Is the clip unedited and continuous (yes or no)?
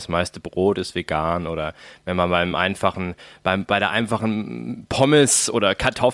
yes